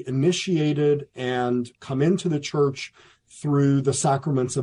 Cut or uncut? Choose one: uncut